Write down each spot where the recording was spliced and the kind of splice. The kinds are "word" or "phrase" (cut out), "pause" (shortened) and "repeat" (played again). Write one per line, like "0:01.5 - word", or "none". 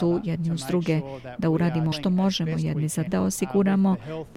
0:01.9 - word
0:03.1 - word